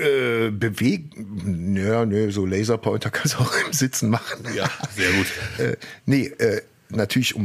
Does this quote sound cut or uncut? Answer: uncut